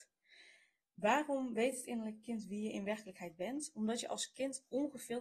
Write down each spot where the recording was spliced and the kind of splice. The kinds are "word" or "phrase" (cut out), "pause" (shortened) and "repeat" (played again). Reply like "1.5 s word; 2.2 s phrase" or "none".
none